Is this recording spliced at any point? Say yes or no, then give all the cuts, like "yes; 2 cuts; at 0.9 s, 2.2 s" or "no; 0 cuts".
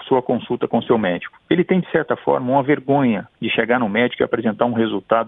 yes; 1 cut; at 3.3 s